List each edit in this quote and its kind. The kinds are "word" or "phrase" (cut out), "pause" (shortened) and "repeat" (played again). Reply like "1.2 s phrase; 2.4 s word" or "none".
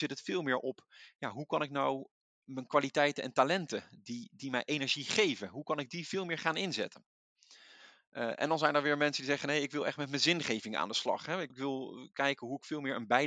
11.5 s word